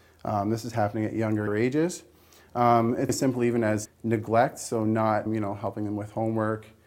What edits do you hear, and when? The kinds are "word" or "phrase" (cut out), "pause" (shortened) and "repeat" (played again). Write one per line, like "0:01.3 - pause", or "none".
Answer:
0:01.5 - phrase
0:03.1 - word
0:03.9 - word
0:05.3 - word